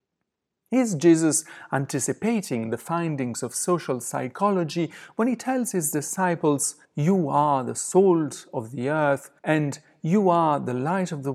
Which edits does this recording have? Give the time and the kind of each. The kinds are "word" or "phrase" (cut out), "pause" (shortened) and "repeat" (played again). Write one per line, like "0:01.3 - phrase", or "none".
0:06.8 - pause
0:09.4 - pause